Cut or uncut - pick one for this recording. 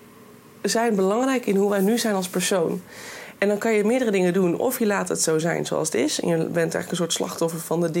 uncut